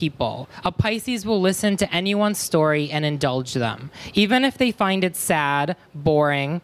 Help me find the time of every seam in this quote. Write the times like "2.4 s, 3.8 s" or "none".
none